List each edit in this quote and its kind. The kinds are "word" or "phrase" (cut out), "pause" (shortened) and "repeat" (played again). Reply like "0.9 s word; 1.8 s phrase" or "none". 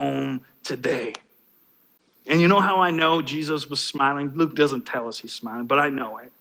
none